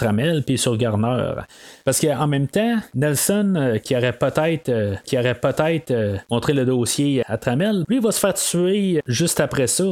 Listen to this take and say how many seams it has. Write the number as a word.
four